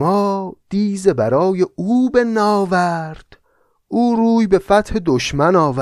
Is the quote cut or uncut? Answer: uncut